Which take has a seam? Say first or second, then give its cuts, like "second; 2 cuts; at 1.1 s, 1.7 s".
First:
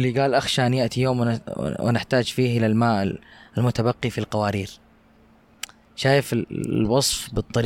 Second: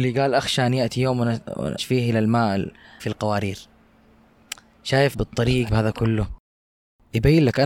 second; 4 cuts; at 1.8 s, 3.0 s, 5.1 s, 5.7 s